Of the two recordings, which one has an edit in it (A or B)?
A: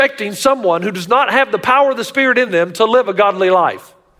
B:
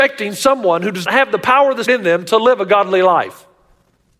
B